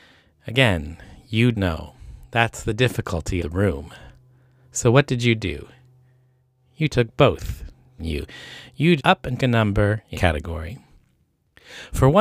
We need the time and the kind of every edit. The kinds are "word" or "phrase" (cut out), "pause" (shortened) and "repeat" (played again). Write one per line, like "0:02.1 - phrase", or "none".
0:01.5 - word
0:03.4 - word
0:08.0 - word
0:09.0 - word
0:09.4 - word
0:10.1 - word